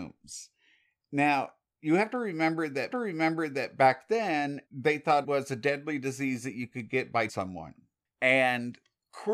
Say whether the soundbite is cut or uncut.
cut